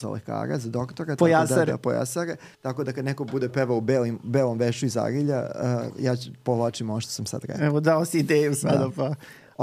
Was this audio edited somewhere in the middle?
yes; 1 cut; at 2.5 s

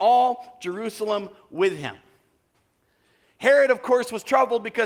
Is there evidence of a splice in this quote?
no; 0 cuts

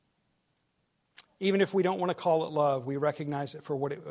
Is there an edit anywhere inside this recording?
no; 0 cuts

